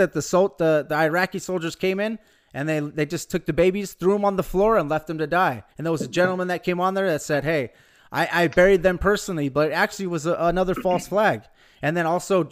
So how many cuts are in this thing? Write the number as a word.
one